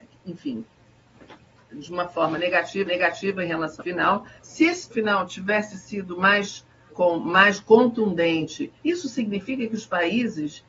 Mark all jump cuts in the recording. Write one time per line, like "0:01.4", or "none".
0:02.9
0:03.8
0:04.4
0:04.9
0:06.9
0:08.8